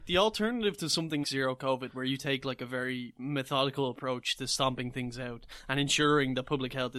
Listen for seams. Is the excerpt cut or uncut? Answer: cut